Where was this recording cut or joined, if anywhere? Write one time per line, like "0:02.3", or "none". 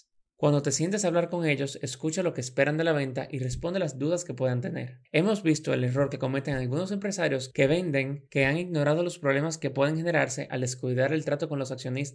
none